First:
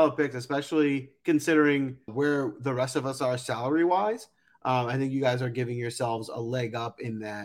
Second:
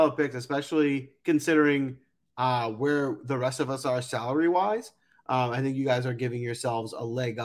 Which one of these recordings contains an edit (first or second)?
first